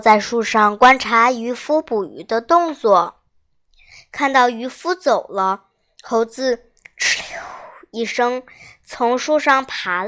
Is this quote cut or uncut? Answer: uncut